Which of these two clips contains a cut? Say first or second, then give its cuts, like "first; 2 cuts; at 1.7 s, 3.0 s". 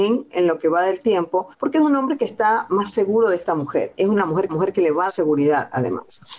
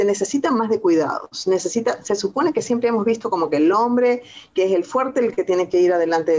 first; 3 cuts; at 1.5 s, 4.5 s, 5.1 s